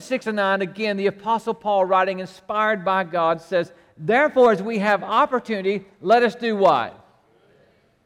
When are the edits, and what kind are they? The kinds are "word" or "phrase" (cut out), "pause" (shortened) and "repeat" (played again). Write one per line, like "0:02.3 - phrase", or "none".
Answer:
none